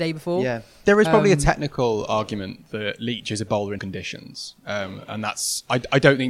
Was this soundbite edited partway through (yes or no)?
yes